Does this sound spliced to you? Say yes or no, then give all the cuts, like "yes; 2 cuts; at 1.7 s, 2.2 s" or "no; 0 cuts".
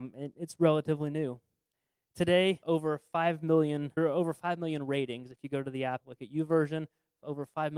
yes; 3 cuts; at 2.6 s, 4.0 s, 6.0 s